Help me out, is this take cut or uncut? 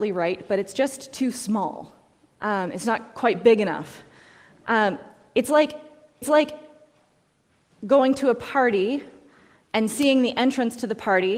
cut